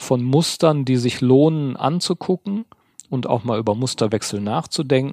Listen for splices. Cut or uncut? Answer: uncut